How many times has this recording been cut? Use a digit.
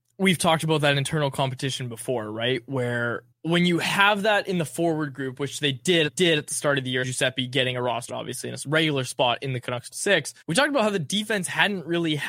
6